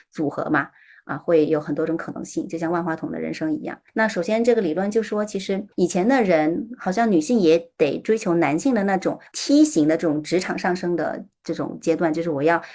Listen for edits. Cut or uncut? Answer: cut